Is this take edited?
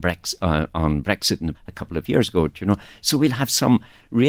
yes; 1 cut; at 1.5 s

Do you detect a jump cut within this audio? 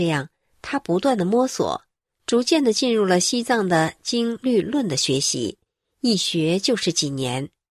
no; 0 cuts

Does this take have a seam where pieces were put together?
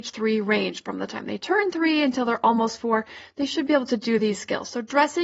no; 0 cuts

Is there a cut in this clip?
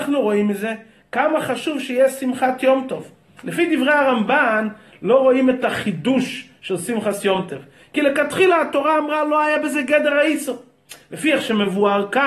no; 0 cuts

